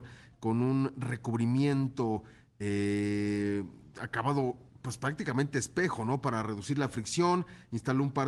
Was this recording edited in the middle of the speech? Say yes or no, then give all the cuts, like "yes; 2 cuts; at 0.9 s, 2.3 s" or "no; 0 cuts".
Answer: no; 0 cuts